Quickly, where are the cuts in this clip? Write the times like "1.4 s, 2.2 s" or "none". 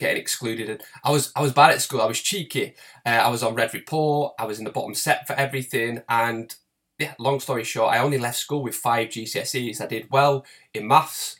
none